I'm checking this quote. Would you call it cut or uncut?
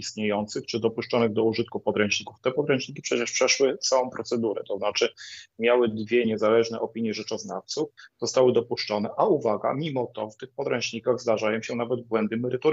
uncut